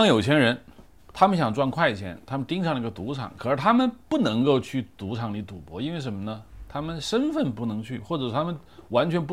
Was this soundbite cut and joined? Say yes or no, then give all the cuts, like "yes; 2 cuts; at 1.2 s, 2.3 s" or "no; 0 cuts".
yes; 2 cuts; at 1.0 s, 4.0 s